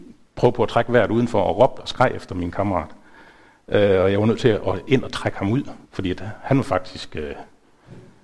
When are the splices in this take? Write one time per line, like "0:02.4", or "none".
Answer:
0:05.8

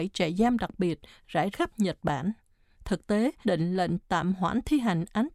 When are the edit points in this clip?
0:01.5
0:02.6
0:03.4

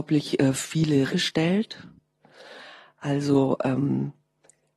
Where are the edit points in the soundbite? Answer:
0:01.1

